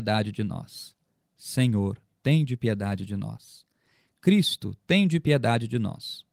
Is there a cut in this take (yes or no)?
no